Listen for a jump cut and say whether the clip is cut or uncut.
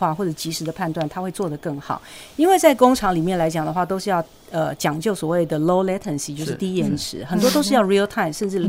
uncut